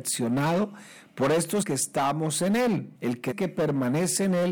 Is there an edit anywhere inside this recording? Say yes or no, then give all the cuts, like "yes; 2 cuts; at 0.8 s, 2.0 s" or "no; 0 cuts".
yes; 3 cuts; at 1.6 s, 2.9 s, 3.3 s